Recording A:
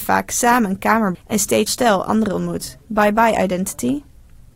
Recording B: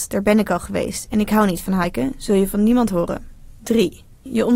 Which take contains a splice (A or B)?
A